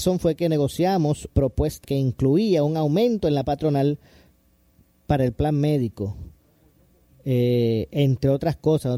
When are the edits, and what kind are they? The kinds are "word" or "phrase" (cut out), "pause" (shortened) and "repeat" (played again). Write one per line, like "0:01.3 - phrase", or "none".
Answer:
0:01.3 - word
0:01.8 - word
0:03.4 - word